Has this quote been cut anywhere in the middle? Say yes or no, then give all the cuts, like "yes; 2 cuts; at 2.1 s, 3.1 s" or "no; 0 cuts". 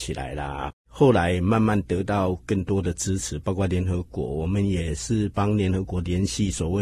no; 0 cuts